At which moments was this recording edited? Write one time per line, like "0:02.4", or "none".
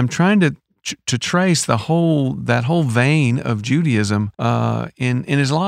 0:04.3